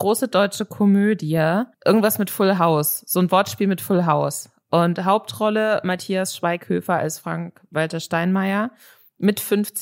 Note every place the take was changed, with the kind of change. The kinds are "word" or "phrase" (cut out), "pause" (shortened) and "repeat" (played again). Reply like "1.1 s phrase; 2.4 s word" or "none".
1.7 s pause